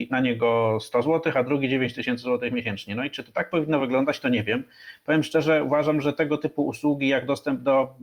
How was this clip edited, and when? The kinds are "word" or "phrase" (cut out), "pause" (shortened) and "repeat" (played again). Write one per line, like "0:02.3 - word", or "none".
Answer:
none